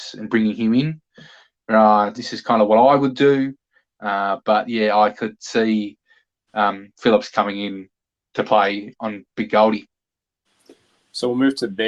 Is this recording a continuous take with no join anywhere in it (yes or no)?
no